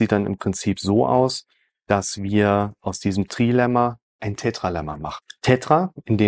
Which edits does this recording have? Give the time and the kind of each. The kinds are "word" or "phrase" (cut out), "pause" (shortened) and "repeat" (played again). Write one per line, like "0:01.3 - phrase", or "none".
none